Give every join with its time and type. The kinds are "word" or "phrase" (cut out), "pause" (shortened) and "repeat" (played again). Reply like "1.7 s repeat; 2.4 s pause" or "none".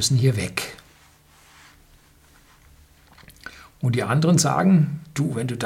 none